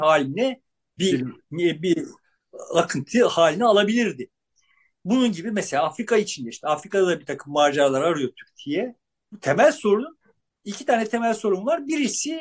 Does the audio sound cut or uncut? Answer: uncut